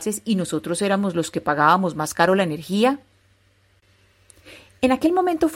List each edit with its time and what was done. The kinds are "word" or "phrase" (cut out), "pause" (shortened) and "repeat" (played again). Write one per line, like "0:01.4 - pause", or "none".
none